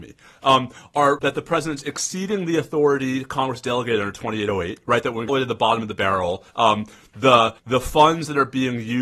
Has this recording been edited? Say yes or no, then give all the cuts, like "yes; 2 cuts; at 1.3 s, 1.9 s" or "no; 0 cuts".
yes; 4 cuts; at 1.2 s, 5.3 s, 6.5 s, 7.6 s